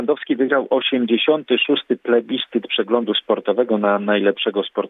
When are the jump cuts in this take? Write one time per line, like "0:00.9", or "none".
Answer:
none